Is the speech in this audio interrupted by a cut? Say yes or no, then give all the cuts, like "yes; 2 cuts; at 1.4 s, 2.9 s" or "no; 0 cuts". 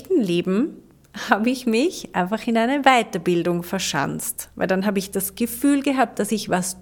no; 0 cuts